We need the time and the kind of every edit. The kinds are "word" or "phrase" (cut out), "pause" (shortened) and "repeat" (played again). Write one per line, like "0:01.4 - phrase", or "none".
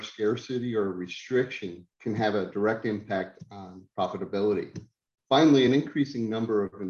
none